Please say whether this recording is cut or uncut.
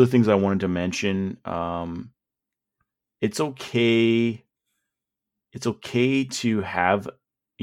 uncut